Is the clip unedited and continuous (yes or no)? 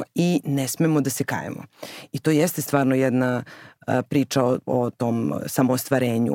yes